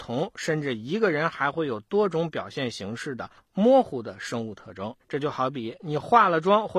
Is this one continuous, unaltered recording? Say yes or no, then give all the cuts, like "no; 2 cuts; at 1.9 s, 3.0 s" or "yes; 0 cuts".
no; 1 cut; at 5.0 s